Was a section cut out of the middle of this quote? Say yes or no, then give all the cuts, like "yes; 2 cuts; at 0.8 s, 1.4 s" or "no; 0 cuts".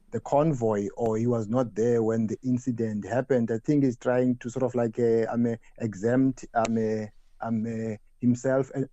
no; 0 cuts